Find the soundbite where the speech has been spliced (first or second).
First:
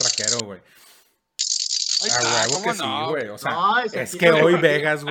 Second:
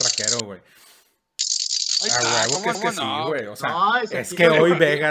second